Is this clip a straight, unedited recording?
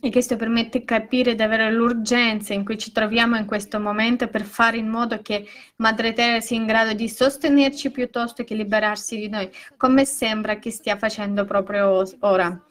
yes; 0 cuts

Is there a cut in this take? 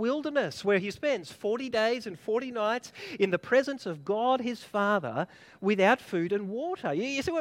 no; 0 cuts

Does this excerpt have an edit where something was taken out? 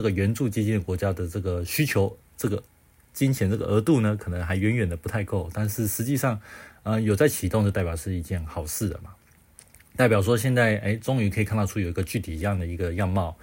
no; 0 cuts

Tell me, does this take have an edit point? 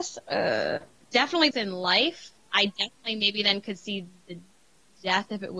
yes; 1 cut; at 1.5 s

